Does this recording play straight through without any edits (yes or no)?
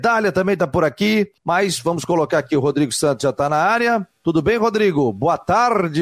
no